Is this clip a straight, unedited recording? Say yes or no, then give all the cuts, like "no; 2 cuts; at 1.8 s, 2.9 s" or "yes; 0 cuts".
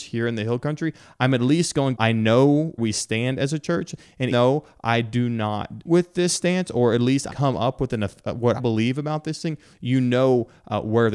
no; 6 cuts; at 2.0 s, 2.8 s, 4.3 s, 5.9 s, 7.3 s, 8.6 s